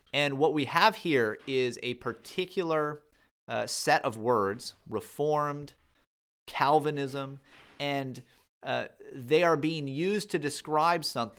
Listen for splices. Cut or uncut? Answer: uncut